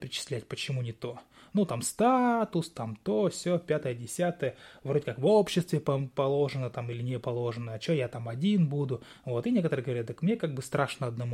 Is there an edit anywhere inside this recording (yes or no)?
no